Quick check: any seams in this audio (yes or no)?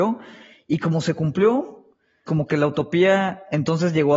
yes